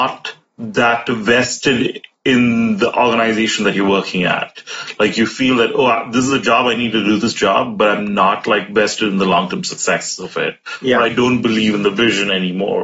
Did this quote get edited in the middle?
no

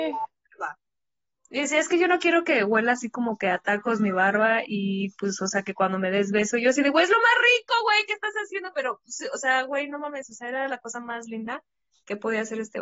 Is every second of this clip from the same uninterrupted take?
yes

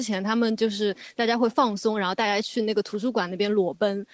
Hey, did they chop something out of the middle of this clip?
no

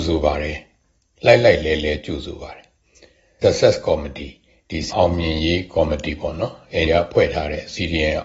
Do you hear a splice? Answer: yes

